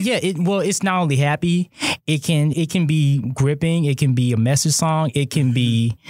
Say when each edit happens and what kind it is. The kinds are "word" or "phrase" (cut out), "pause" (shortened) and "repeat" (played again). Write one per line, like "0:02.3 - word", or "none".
0:02.5 - word